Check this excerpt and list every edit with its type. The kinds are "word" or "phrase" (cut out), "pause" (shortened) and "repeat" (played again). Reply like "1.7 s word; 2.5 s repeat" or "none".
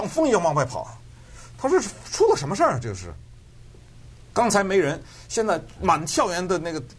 none